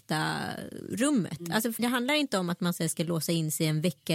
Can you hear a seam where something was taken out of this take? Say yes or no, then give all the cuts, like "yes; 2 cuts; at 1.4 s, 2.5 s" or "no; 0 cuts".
yes; 1 cut; at 1.8 s